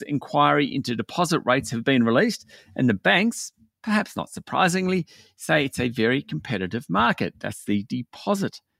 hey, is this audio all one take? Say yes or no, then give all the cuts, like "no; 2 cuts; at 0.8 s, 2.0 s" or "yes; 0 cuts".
yes; 0 cuts